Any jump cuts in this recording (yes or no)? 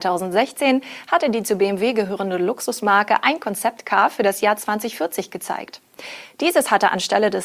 no